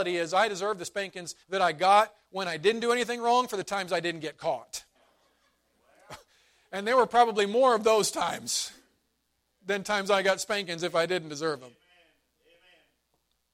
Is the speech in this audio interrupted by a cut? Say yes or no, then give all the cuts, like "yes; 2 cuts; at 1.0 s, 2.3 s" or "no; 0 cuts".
yes; 2 cuts; at 1.4 s, 4.9 s